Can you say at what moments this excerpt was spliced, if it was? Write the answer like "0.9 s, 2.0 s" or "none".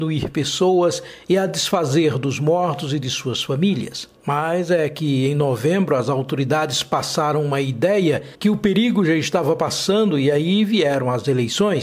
4.2 s, 8.3 s